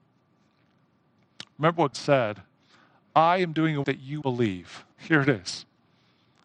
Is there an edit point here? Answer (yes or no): yes